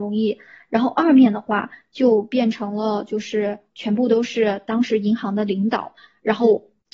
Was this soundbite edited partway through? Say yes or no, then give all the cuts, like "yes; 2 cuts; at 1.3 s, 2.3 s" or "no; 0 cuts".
no; 0 cuts